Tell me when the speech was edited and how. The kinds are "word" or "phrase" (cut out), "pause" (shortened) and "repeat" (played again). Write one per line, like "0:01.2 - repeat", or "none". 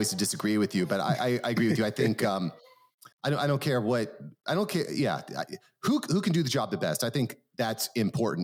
0:03.1 - pause